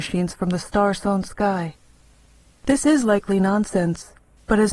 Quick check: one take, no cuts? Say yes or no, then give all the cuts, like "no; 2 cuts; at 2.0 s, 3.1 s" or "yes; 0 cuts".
yes; 0 cuts